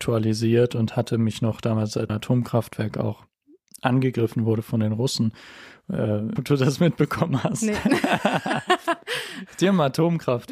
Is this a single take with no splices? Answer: no; 2 cuts; at 2.1 s, 6.4 s

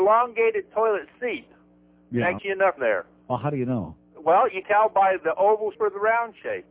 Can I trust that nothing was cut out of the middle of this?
no; 4 cuts; at 2.4 s, 2.8 s, 4.6 s, 5.7 s

